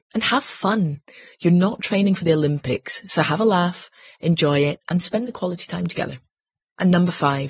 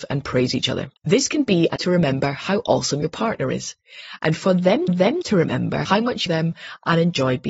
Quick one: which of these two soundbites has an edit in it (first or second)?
second